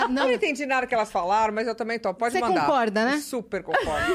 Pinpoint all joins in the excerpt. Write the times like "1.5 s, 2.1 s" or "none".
none